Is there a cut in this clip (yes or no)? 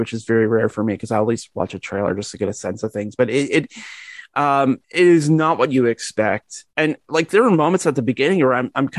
yes